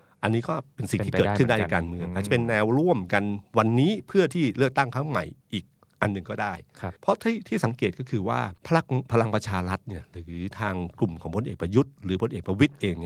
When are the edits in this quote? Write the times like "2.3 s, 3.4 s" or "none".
7.0 s, 8.6 s